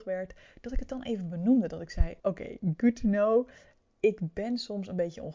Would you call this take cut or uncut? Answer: cut